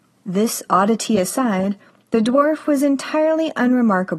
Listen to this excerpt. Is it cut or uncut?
uncut